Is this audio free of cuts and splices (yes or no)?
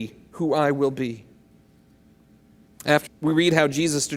no